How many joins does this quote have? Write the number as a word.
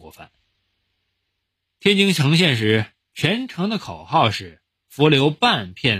one